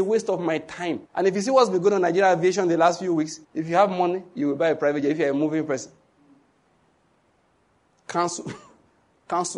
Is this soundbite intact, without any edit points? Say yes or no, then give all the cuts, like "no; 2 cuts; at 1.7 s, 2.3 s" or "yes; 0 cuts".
no; 2 cuts; at 1.1 s, 3.4 s